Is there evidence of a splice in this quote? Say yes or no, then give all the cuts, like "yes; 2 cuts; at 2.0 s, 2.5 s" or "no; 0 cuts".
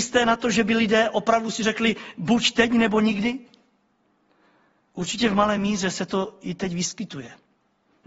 no; 0 cuts